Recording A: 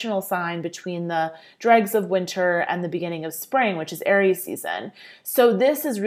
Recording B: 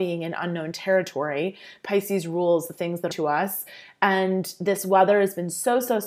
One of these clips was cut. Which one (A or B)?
B